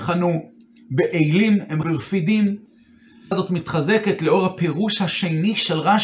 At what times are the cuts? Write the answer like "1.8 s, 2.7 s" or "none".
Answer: 1.8 s, 3.3 s